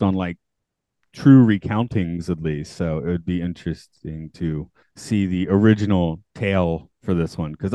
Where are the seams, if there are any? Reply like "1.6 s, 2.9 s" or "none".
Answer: 4.8 s